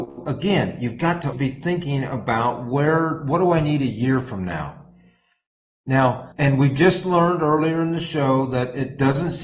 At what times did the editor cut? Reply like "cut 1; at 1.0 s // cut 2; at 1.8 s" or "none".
cut 1; at 1.3 s // cut 2; at 6.3 s

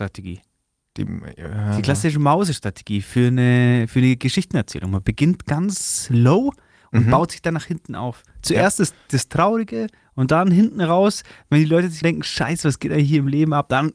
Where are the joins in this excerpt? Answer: cut 1; at 12.0 s

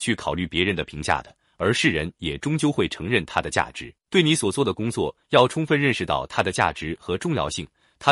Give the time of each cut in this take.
cut 1; at 4.0 s

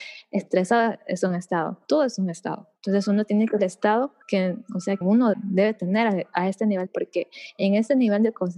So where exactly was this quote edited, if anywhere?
cut 1; at 1.8 s // cut 2; at 2.8 s // cut 3; at 3.6 s // cut 4; at 4.2 s // cut 5; at 5.0 s // cut 6; at 5.3 s // cut 7; at 6.9 s

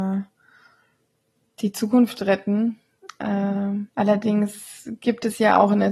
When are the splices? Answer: cut 1; at 3.9 s

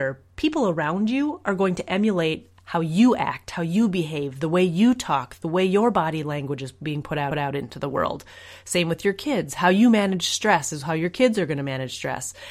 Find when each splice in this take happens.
cut 1; at 7.3 s

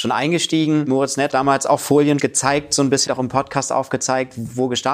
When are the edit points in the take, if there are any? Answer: cut 1; at 1.3 s // cut 2; at 2.2 s // cut 3; at 3.1 s

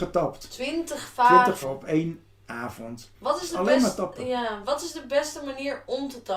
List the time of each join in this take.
cut 1; at 1.6 s // cut 2; at 3.1 s

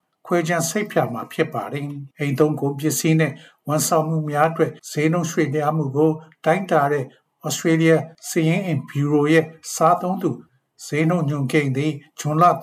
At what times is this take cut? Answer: cut 1; at 2.1 s // cut 2; at 4.8 s // cut 3; at 8.2 s

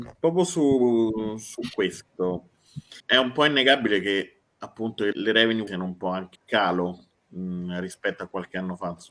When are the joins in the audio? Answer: cut 1; at 3.0 s // cut 2; at 5.1 s // cut 3; at 5.7 s // cut 4; at 6.3 s

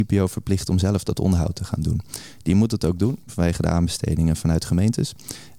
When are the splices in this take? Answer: none

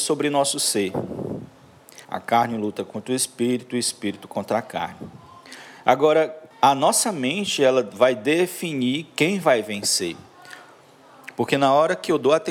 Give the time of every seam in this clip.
cut 1; at 2.0 s // cut 2; at 6.5 s

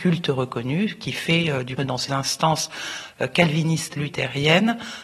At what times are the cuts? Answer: cut 1; at 1.8 s // cut 2; at 2.1 s // cut 3; at 4.0 s

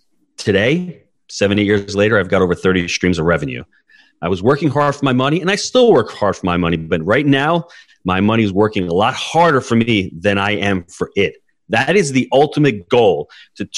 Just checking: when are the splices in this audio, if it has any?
none

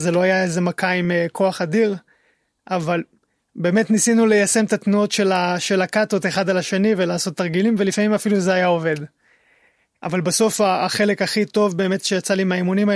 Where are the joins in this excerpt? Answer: none

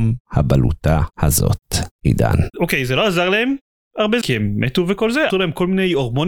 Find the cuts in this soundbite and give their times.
cut 1; at 4.2 s // cut 2; at 5.3 s

